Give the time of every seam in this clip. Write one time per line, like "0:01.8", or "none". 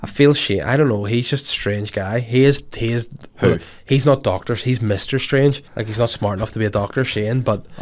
0:05.7